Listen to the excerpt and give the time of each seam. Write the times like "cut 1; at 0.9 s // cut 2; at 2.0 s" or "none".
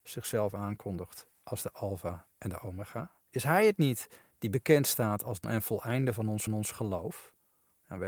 cut 1; at 2.3 s // cut 2; at 3.2 s // cut 3; at 5.4 s // cut 4; at 6.5 s